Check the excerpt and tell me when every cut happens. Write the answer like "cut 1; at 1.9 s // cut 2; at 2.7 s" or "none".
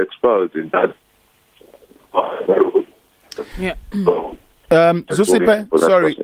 cut 1; at 5.1 s